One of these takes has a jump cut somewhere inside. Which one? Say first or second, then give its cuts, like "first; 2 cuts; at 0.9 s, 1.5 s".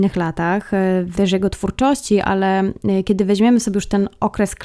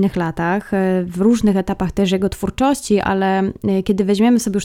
first; 1 cut; at 1.1 s